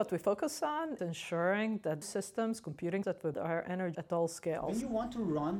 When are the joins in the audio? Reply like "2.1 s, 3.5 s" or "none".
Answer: 1.0 s, 2.0 s, 3.0 s, 3.3 s, 3.9 s